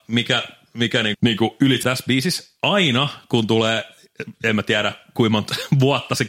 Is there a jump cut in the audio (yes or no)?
yes